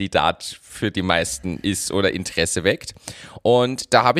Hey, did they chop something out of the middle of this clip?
no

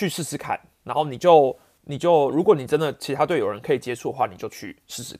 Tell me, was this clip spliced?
no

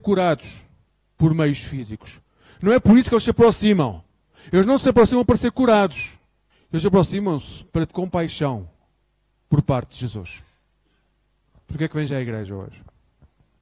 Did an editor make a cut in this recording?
yes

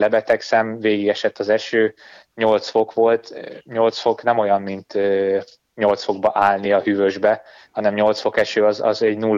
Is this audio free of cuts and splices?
yes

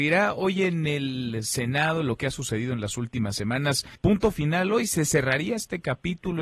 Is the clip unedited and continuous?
no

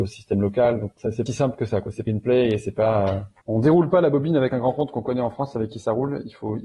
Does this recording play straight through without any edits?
no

